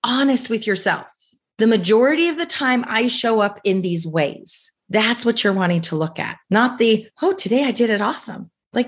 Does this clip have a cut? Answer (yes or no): no